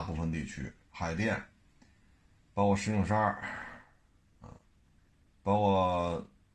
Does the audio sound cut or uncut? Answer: uncut